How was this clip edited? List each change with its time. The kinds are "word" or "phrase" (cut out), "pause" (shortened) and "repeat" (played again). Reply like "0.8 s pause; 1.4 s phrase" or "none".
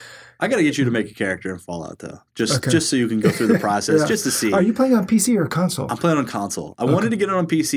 none